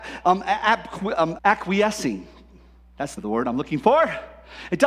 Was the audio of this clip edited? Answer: yes; 2 cuts; at 1.4 s, 3.2 s

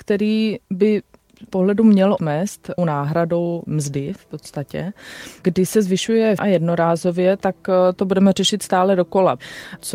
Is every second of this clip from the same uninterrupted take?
no; 4 cuts; at 1.5 s, 2.2 s, 2.8 s, 6.4 s

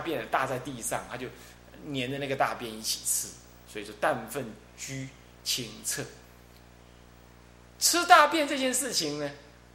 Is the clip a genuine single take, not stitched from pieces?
yes; 0 cuts

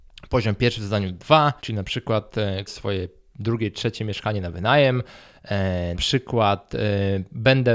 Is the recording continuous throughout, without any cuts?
no; 3 cuts; at 1.6 s, 2.7 s, 5.9 s

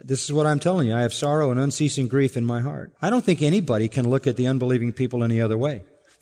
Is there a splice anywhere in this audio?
yes; 1 cut; at 3.0 s

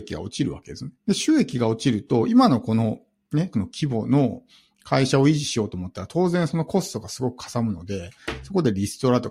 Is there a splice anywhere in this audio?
yes; 2 cuts; at 1.0 s, 3.5 s

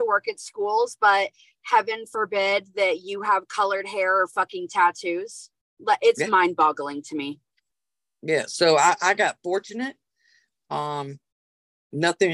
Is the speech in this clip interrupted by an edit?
no; 0 cuts

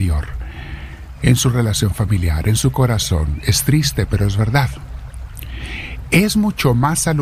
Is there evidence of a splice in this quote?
no; 0 cuts

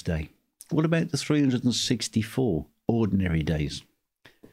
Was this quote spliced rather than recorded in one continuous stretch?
no; 0 cuts

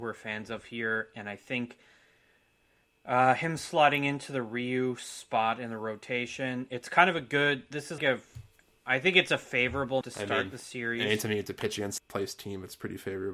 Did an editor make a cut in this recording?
yes; 3 cuts; at 8.0 s, 10.0 s, 12.0 s

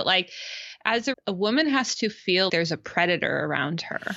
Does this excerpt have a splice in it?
yes; 2 cuts; at 1.1 s, 2.5 s

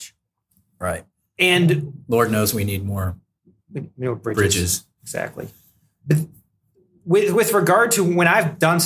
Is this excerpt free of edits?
yes; 0 cuts

